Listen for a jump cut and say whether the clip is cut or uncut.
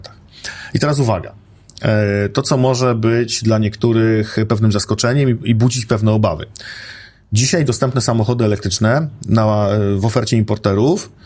uncut